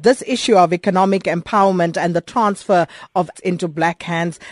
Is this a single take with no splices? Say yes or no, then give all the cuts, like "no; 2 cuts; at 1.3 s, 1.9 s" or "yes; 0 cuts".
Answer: no; 1 cut; at 3.3 s